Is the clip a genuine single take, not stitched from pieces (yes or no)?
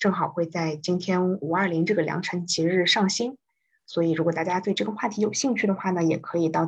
yes